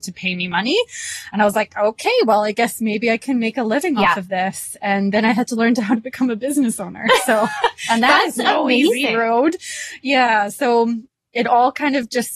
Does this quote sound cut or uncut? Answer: uncut